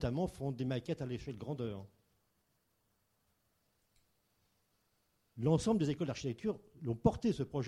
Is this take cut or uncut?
uncut